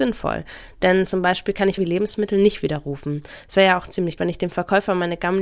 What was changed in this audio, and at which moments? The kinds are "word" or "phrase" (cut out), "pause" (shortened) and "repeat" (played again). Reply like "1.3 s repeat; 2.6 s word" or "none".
1.8 s phrase; 4.2 s word

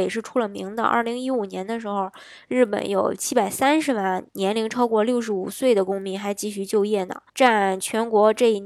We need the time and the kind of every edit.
4.3 s pause; 7.3 s pause

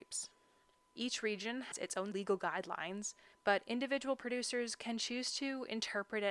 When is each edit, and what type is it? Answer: 1.7 s word; 2.1 s phrase; 3.3 s pause

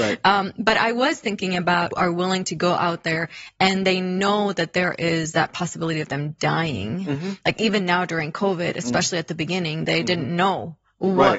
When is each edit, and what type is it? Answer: 1.9 s phrase

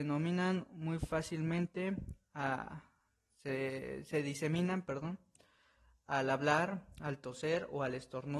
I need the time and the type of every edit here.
none

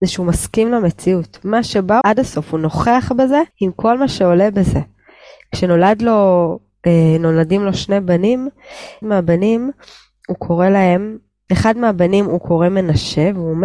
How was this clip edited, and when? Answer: 2.0 s phrase; 3.5 s pause; 9.0 s word

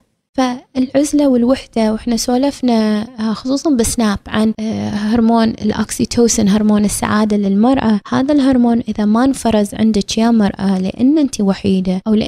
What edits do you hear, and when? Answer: none

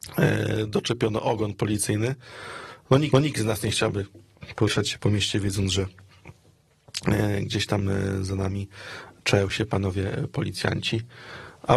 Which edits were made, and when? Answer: 3.1 s repeat

